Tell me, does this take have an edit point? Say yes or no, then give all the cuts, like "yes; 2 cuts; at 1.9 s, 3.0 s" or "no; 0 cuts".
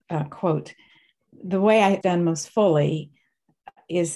yes; 1 cut; at 2.0 s